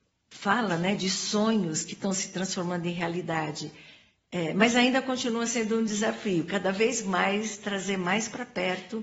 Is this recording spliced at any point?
no; 0 cuts

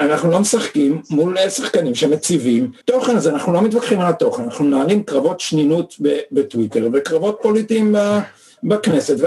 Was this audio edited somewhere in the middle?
yes; 1 cut; at 2.8 s

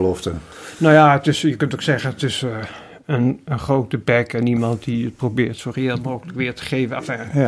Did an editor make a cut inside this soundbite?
no; 0 cuts

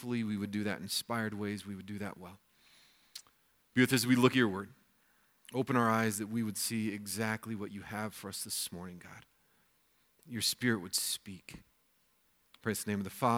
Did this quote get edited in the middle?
no; 0 cuts

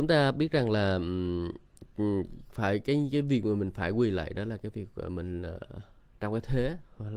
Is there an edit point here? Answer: no; 0 cuts

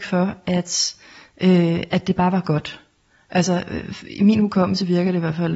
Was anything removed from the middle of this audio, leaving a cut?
no; 0 cuts

